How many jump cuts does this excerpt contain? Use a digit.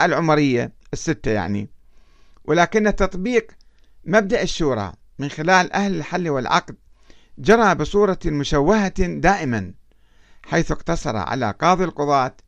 0